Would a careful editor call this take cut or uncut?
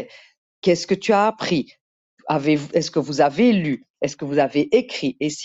uncut